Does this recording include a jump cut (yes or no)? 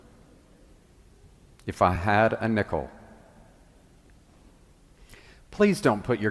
no